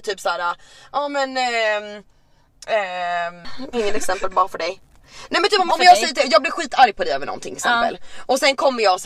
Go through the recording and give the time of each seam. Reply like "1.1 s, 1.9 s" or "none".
3.7 s, 5.7 s, 7.6 s